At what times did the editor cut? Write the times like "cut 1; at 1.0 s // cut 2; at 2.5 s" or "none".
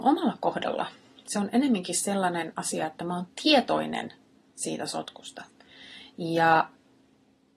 none

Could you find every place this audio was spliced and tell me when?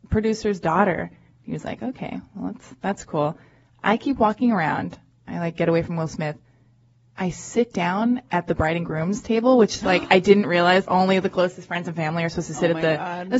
none

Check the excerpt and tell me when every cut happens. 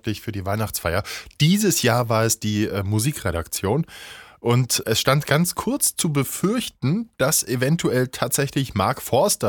cut 1; at 4.8 s

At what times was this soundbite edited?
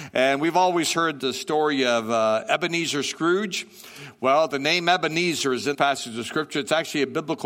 cut 1; at 1.2 s // cut 2; at 5.7 s

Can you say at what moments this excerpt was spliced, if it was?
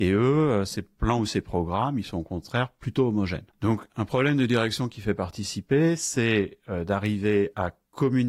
cut 1; at 3.5 s

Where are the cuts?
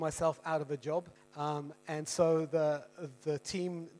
cut 1; at 1.2 s

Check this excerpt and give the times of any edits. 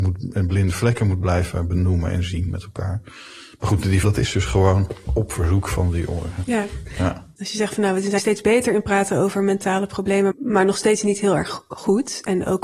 cut 1; at 4.0 s // cut 2; at 8.2 s // cut 3; at 10.3 s

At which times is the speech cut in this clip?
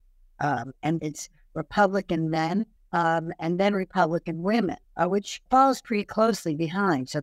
cut 1; at 1.0 s // cut 2; at 2.8 s // cut 3; at 4.8 s // cut 4; at 5.5 s

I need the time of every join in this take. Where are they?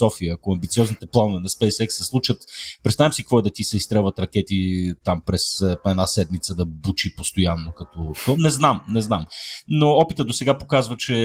none

